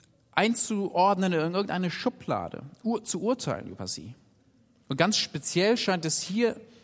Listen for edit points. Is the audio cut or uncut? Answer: uncut